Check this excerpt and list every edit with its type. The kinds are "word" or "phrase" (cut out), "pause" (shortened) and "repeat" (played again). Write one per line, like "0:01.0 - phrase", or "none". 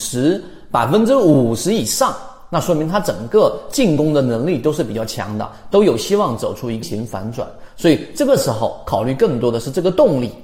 0:06.8 - word